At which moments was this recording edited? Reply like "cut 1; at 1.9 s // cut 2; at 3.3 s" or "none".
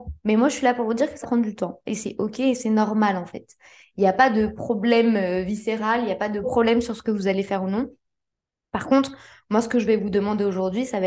cut 1; at 1.2 s // cut 2; at 6.4 s